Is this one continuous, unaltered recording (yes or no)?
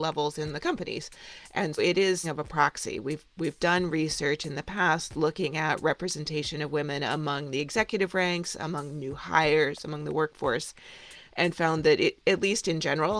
no